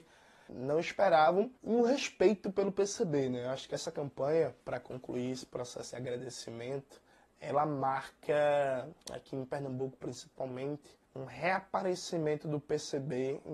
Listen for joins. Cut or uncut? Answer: cut